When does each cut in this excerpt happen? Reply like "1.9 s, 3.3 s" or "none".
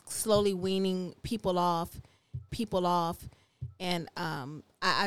2.5 s